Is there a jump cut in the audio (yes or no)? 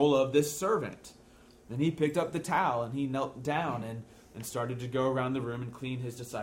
no